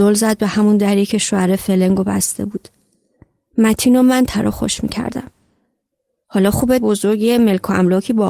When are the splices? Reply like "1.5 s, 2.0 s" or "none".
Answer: 6.8 s